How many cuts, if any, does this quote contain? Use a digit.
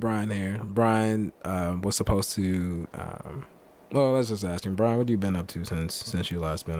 0